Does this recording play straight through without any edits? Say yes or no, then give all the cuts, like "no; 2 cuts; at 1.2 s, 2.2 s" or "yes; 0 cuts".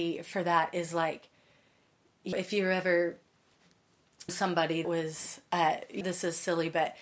no; 4 cuts; at 2.3 s, 4.3 s, 4.8 s, 6.0 s